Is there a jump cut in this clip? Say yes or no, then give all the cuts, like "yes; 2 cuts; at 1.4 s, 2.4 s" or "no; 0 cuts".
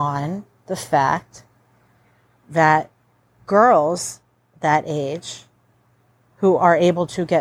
no; 0 cuts